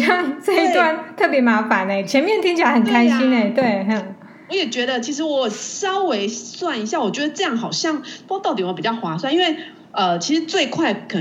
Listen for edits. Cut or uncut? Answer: uncut